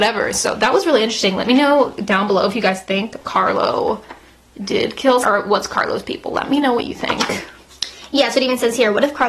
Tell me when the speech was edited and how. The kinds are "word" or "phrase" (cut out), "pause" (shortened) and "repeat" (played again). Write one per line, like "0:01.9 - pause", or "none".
0:05.2 - word